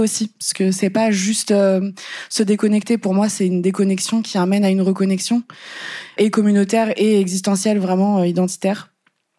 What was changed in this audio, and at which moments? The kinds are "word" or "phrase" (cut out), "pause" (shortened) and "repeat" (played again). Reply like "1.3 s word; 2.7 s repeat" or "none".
6.2 s word